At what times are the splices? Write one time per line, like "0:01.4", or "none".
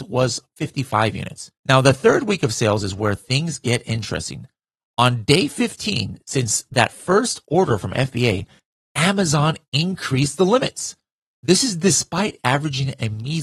0:01.6